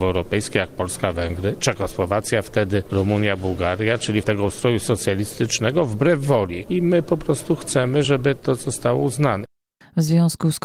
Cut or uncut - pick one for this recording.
uncut